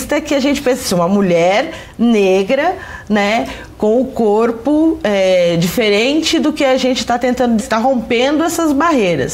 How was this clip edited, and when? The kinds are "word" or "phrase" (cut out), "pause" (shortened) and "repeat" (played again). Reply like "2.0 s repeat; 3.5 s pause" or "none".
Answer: 7.6 s word